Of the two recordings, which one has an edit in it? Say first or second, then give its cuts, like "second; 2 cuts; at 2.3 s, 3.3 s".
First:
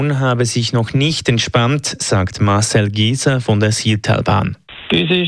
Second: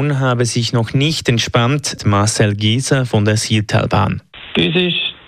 second; 1 cut; at 2.0 s